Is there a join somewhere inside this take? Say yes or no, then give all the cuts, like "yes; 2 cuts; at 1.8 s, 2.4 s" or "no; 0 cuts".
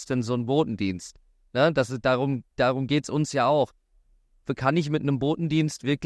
no; 0 cuts